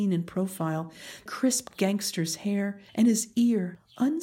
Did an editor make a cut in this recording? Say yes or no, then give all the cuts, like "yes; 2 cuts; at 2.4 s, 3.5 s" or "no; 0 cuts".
yes; 2 cuts; at 1.3 s, 2.9 s